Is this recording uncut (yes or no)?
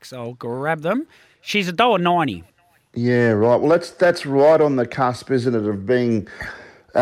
yes